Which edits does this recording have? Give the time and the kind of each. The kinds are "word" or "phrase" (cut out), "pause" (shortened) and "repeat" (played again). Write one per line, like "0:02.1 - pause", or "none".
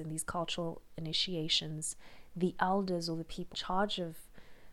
0:03.5 - word